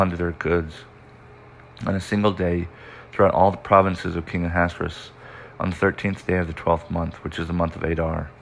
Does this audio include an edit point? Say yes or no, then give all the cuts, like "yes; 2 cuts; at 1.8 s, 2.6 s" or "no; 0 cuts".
no; 0 cuts